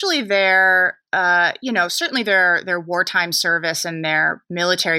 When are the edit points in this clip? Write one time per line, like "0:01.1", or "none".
none